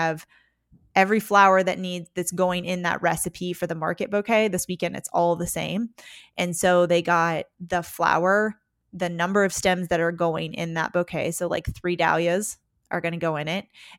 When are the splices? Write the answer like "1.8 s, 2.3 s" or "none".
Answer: none